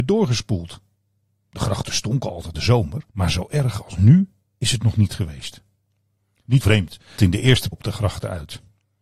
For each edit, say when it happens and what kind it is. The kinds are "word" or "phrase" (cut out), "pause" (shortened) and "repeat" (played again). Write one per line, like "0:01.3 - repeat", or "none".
0:02.5 - phrase
0:03.1 - pause
0:06.6 - word
0:07.2 - word
0:07.7 - phrase